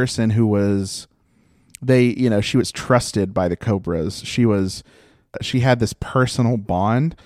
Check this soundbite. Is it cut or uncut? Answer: uncut